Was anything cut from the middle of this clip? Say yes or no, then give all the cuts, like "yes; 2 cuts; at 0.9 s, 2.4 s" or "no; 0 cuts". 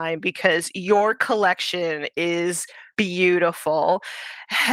yes; 1 cut; at 2.9 s